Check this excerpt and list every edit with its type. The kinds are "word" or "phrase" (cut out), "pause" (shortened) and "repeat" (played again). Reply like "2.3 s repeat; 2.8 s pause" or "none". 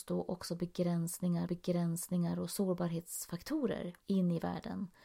1.5 s repeat; 4.0 s pause